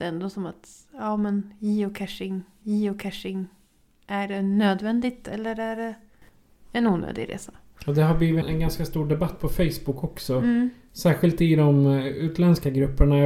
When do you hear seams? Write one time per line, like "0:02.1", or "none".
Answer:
0:02.6
0:08.4